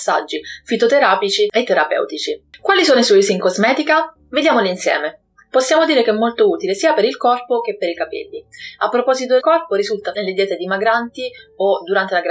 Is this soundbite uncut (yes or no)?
no